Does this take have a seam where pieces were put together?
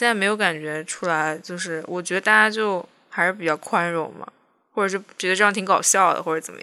no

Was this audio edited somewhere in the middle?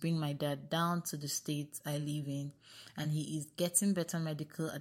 no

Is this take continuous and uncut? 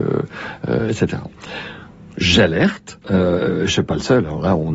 no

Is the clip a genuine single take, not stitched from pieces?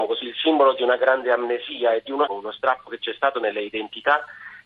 no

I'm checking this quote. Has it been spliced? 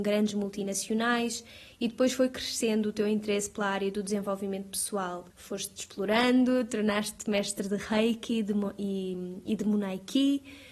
yes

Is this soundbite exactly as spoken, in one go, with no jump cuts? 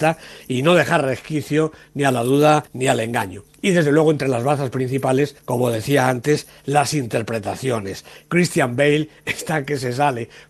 no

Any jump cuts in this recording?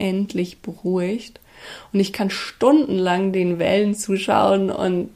no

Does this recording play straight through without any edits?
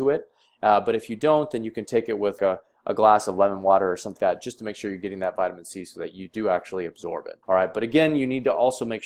no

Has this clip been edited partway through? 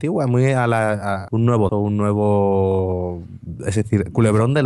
yes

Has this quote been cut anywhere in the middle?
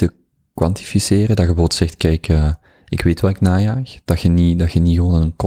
no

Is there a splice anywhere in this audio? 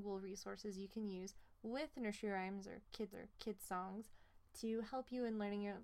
yes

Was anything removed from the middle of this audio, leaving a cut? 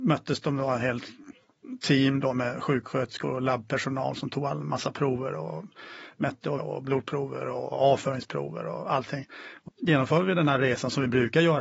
yes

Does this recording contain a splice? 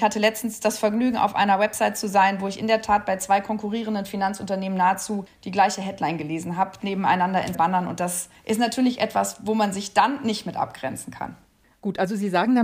yes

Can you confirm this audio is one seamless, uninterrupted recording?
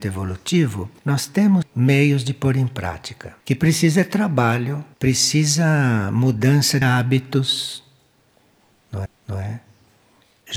no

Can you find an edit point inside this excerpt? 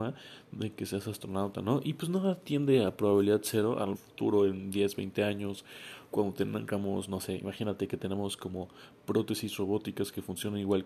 yes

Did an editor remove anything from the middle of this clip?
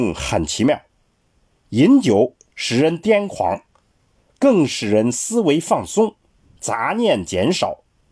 no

